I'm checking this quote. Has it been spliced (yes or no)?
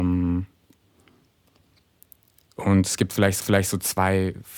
yes